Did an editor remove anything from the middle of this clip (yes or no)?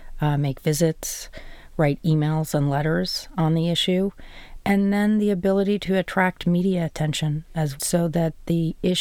yes